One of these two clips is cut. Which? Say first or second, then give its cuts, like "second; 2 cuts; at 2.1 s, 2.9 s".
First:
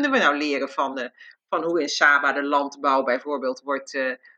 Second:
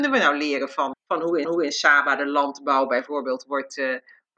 second; 2 cuts; at 0.9 s, 1.4 s